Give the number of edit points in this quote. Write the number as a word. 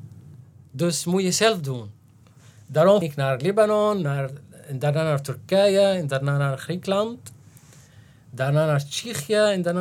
one